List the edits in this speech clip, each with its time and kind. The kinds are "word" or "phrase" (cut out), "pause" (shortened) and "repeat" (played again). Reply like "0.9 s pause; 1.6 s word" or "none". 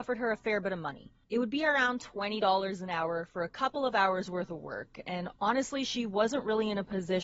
1.2 s pause; 5.4 s pause